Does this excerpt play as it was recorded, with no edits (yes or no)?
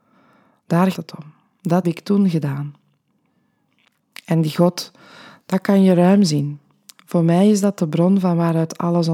no